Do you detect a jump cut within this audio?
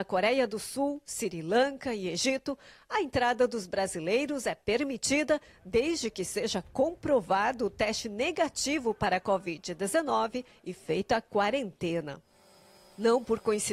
no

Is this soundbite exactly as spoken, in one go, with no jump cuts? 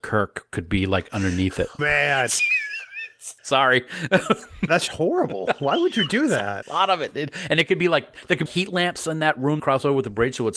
no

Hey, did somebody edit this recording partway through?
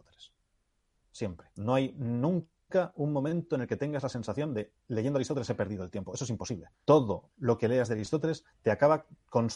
yes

